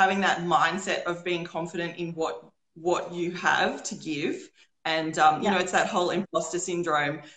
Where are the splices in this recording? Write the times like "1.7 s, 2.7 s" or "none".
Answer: none